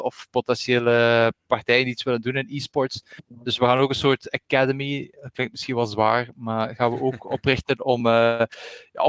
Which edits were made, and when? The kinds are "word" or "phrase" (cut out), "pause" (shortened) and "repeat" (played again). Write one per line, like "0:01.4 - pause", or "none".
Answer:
none